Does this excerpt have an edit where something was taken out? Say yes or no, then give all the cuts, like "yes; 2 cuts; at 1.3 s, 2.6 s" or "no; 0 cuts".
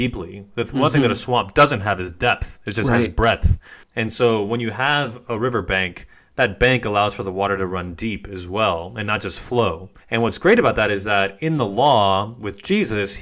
yes; 2 cuts; at 3.8 s, 10.0 s